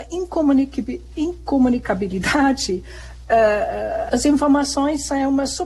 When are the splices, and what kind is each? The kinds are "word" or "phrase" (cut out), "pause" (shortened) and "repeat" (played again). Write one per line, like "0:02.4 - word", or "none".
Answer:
0:04.1 - word